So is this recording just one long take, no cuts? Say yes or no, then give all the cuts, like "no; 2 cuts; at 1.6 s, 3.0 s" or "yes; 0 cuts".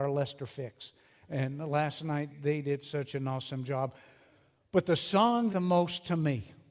no; 2 cuts; at 2.3 s, 5.5 s